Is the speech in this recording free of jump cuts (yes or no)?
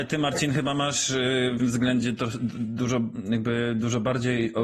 no